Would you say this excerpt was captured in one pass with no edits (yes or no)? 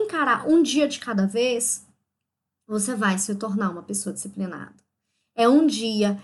yes